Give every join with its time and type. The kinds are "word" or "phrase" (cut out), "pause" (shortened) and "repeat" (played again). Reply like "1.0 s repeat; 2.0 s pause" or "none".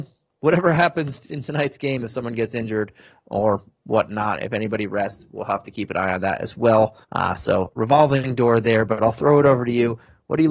7.0 s pause